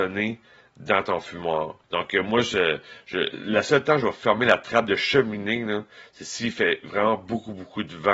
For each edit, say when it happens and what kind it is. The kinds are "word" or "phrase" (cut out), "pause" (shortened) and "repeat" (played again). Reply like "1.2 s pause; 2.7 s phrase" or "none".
1.8 s pause